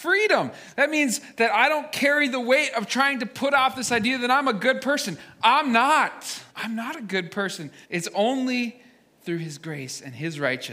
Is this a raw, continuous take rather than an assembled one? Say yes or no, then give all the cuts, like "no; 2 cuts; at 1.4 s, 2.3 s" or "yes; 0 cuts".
no; 2 cuts; at 6.5 s, 7.8 s